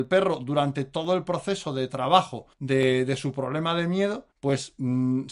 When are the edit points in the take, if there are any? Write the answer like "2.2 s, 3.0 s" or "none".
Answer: 2.5 s, 4.3 s